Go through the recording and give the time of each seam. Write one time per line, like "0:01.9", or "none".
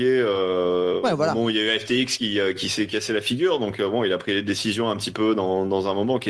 none